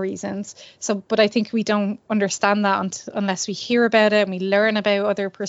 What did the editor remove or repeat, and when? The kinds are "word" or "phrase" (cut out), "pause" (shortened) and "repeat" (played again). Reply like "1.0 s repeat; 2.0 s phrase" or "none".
none